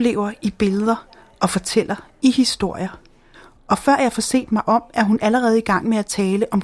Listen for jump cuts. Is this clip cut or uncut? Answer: uncut